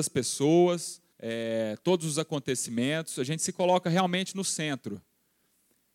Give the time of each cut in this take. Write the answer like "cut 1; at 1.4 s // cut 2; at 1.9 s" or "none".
cut 1; at 1.1 s